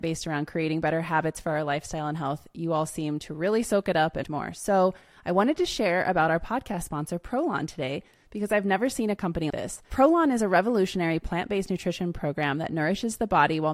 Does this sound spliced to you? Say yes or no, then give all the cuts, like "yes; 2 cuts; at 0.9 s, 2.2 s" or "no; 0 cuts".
yes; 2 cuts; at 4.2 s, 9.5 s